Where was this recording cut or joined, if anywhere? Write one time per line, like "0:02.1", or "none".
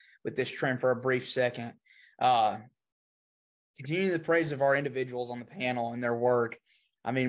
none